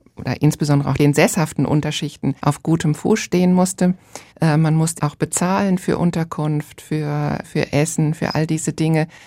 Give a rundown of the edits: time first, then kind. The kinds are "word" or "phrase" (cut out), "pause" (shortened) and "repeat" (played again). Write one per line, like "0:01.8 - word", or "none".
0:02.4 - pause
0:04.3 - pause
0:05.0 - phrase
0:07.4 - word